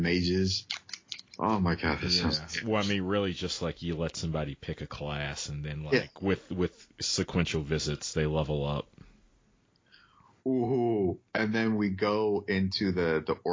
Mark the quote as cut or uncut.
uncut